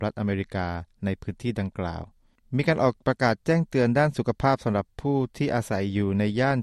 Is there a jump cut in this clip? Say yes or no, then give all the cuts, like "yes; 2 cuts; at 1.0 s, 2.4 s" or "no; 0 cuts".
no; 0 cuts